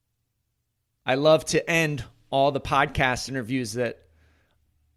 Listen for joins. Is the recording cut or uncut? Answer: uncut